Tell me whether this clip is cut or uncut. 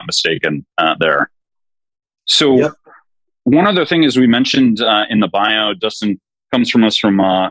uncut